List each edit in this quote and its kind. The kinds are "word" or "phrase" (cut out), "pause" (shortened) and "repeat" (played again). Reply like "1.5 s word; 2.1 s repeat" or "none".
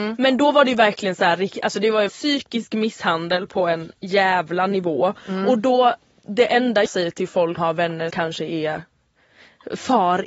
2.1 s word; 6.9 s word; 7.6 s word; 8.1 s word